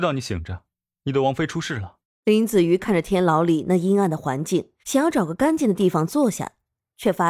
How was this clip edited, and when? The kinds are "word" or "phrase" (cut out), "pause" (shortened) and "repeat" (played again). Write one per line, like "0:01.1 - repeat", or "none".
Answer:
0:02.0 - pause
0:04.8 - pause